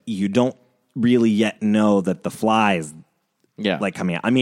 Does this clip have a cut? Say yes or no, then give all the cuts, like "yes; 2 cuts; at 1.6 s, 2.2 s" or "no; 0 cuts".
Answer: no; 0 cuts